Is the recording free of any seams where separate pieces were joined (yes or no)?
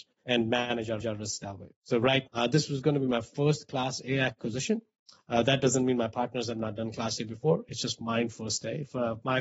no